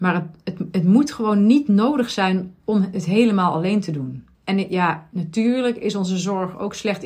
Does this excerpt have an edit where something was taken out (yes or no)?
yes